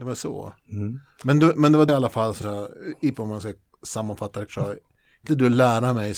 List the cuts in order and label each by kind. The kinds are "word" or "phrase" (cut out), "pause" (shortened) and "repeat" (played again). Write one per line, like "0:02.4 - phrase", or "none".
0:01.9 - word
0:02.4 - word
0:03.1 - word
0:04.5 - word
0:05.3 - word